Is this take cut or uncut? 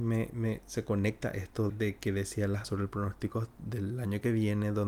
cut